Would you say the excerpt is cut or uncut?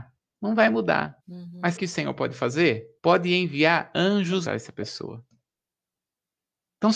cut